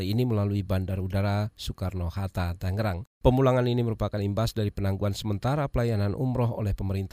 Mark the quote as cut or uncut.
uncut